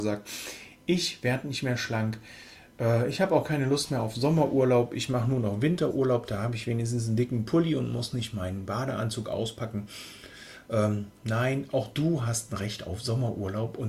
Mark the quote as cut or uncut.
uncut